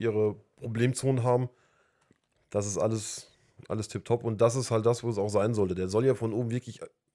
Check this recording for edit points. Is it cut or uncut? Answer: cut